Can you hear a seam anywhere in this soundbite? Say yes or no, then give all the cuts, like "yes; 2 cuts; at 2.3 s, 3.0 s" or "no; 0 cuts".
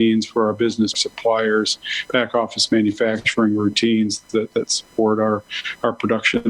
yes; 1 cut; at 0.9 s